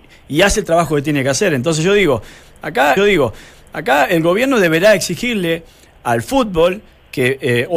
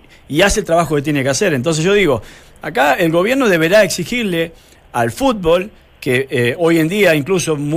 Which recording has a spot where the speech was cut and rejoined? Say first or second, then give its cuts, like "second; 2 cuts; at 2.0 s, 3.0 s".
first; 1 cut; at 3.0 s